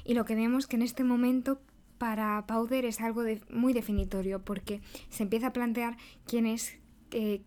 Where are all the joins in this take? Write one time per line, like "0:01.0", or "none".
none